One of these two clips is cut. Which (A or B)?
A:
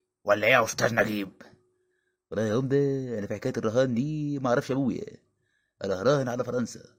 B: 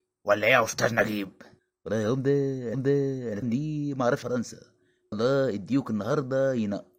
B